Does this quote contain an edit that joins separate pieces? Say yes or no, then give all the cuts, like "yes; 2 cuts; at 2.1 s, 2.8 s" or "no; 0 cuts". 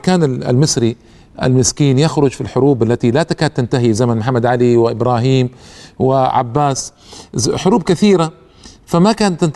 no; 0 cuts